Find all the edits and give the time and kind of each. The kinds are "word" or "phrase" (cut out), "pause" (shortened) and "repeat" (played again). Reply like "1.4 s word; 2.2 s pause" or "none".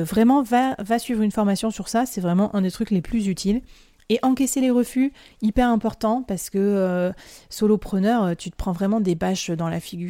none